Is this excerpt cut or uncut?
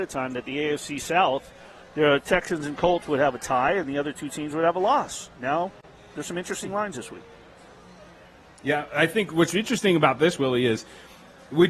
uncut